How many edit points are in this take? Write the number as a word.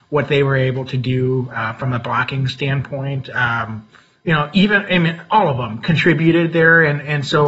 zero